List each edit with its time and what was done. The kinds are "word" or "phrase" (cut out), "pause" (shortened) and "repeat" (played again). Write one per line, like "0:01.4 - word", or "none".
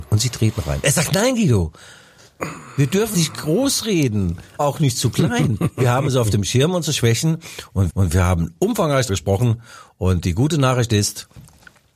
0:03.1 - word
0:04.6 - word
0:07.9 - repeat
0:09.1 - word